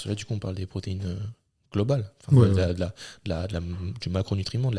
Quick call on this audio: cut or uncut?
uncut